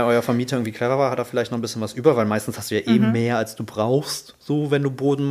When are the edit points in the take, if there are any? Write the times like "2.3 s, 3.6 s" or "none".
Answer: none